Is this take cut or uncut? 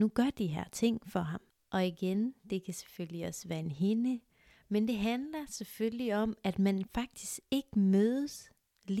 uncut